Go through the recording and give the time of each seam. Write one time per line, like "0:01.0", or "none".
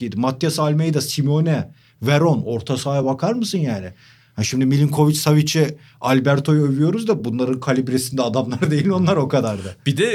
none